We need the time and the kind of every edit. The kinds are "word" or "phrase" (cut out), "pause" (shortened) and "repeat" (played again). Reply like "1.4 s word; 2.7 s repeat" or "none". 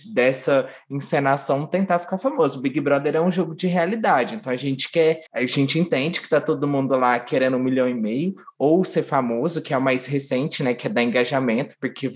5.3 s pause